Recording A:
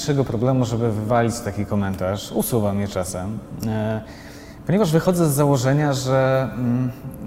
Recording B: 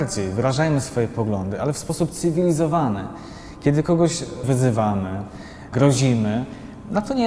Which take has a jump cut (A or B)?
B